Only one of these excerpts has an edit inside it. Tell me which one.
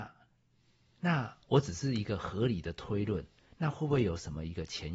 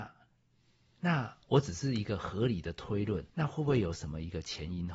second; 1 cut; at 3.3 s

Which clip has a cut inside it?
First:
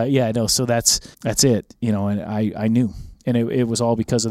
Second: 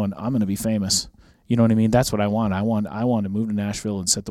first; 1 cut; at 1.1 s

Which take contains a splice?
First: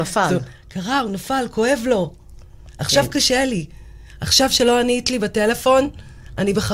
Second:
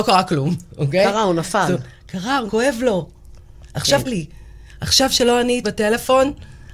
second; 3 cuts; at 2.5 s, 4.0 s, 5.6 s

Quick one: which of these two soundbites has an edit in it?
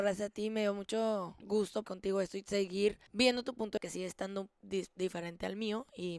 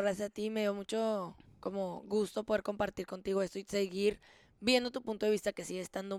first; 4 cuts; at 1.4 s, 1.8 s, 3.1 s, 3.8 s

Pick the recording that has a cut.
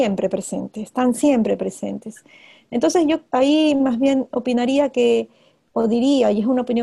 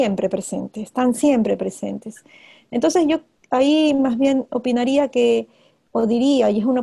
first; 1 cut; at 3.3 s

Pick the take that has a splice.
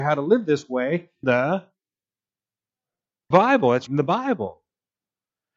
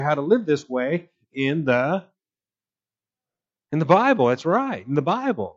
first; 3 cuts; at 1.2 s, 3.3 s, 3.9 s

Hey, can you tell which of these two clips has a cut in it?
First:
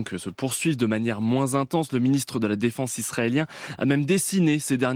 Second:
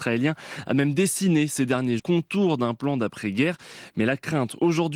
second; 1 cut; at 2.0 s

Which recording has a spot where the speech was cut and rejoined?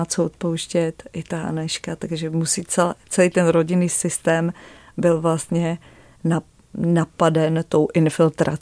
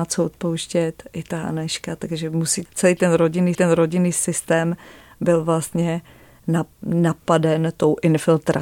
second; 3 cuts; at 2.7 s, 3.5 s, 6.7 s

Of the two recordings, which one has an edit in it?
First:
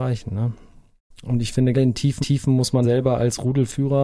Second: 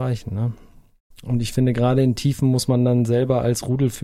first; 3 cuts; at 1.7 s, 2.2 s, 2.8 s

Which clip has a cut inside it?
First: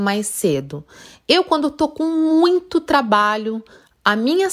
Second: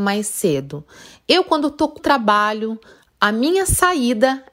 second; 1 cut; at 2.0 s

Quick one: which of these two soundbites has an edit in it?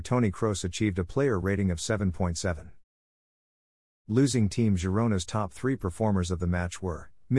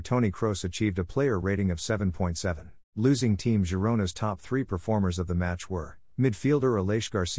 second; 1 cut; at 2.8 s

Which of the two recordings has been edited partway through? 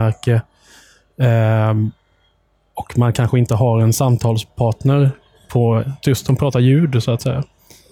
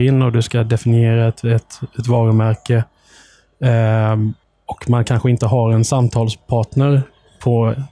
second; 1 cut; at 4.4 s

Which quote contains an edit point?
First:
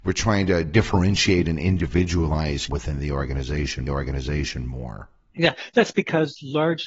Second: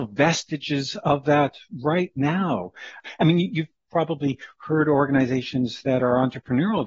first; 2 cuts; at 2.7 s, 3.9 s

